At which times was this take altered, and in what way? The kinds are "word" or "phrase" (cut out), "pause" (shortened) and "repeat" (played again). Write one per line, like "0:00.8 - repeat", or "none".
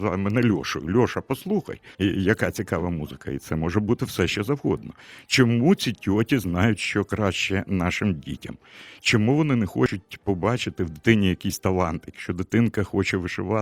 0:01.9 - pause